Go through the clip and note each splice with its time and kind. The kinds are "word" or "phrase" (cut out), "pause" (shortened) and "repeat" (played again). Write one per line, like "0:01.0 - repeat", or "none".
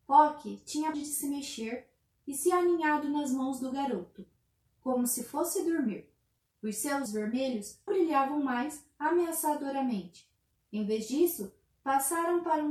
0:00.9 - word
0:07.1 - word
0:07.9 - word